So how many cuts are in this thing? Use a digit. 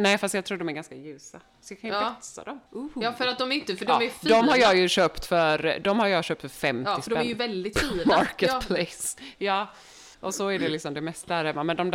2